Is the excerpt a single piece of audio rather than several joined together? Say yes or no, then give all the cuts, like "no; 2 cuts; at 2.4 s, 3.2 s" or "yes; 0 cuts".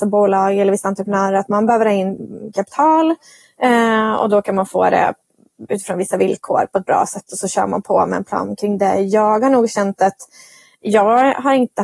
yes; 0 cuts